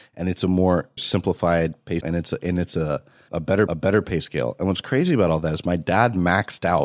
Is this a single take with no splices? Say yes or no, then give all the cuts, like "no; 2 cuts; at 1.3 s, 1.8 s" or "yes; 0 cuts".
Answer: no; 4 cuts; at 1.0 s, 2.0 s, 3.3 s, 3.7 s